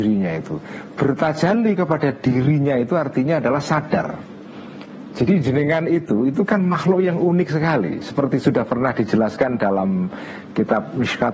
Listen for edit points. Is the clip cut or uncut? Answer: uncut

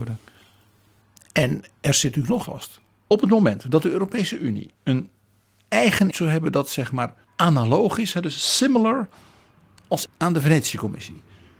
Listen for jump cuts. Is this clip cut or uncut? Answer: cut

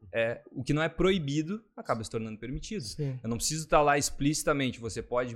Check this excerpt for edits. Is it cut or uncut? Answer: uncut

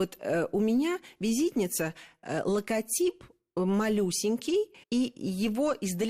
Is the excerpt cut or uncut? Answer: cut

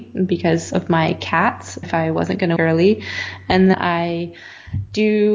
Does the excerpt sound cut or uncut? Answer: cut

